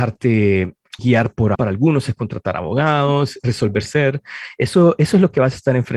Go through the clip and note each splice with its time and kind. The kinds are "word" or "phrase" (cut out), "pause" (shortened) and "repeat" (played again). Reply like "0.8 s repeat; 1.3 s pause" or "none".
1.0 s word; 1.5 s word; 3.4 s word; 3.9 s phrase